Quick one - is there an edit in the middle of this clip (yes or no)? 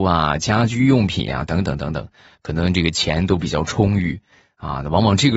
no